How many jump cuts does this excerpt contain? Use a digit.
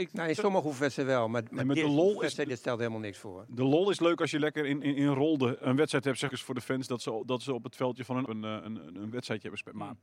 2